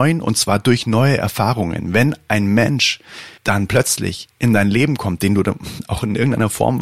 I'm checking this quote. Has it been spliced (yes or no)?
yes